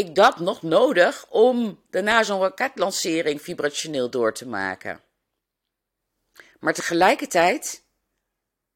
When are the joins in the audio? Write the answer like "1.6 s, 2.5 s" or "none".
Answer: 1.9 s